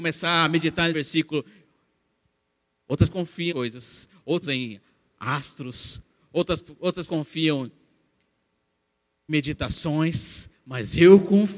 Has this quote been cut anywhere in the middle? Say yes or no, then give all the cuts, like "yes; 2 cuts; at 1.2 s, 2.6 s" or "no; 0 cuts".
yes; 6 cuts; at 0.9 s, 3.1 s, 3.5 s, 4.4 s, 7.1 s, 9.3 s